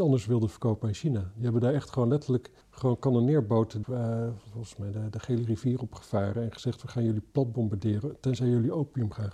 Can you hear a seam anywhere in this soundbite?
yes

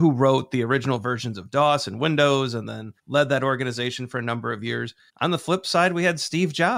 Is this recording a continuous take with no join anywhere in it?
no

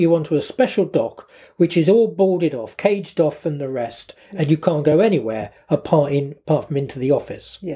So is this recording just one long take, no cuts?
yes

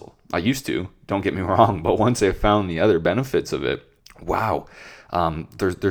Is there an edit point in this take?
yes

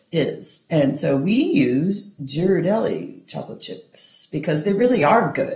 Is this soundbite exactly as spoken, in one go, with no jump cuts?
yes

